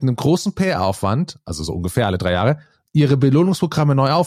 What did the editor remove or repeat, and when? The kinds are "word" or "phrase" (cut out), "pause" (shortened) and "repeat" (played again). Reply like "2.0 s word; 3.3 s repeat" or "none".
none